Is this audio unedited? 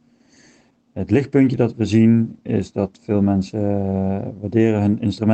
yes; 0 cuts

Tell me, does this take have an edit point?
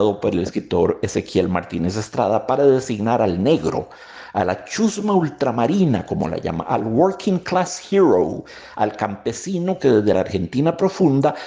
no; 0 cuts

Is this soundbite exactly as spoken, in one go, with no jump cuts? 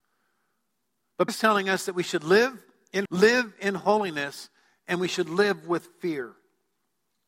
no; 2 cuts; at 1.3 s, 3.1 s

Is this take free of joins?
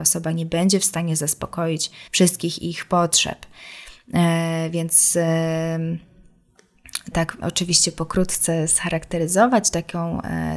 no; 3 cuts; at 2.1 s, 7.1 s, 7.4 s

